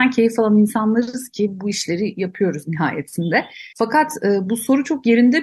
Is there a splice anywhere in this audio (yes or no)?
yes